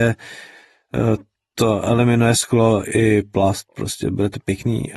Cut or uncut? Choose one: uncut